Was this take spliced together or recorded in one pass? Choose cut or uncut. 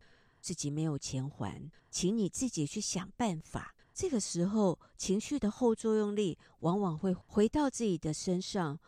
cut